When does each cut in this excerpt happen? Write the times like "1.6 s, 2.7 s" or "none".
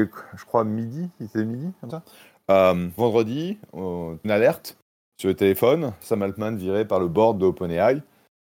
1.9 s, 3.0 s, 4.2 s